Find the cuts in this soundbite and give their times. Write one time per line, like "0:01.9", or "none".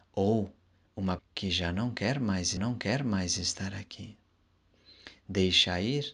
0:01.2
0:02.6

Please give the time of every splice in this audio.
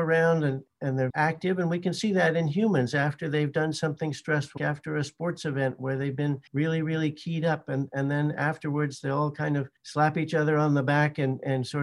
0:01.1
0:04.6
0:06.5
0:09.8

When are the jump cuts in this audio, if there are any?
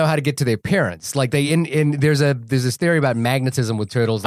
none

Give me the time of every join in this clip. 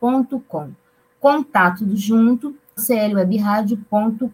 0:01.8
0:02.8

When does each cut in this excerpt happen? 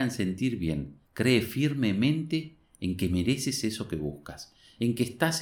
0:01.0

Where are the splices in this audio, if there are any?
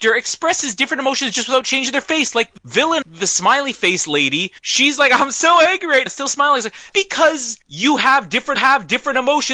0:02.6
0:03.0
0:04.6
0:06.1
0:06.9
0:07.6
0:08.6

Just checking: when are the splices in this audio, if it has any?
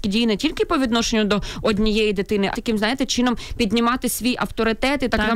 0:02.5

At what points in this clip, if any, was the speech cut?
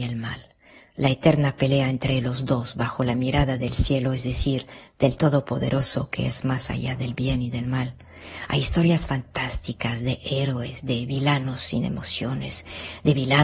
none

